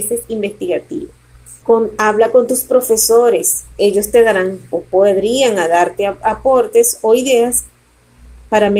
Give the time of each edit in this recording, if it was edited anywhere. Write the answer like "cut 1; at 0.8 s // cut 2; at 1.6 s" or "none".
cut 1; at 1.6 s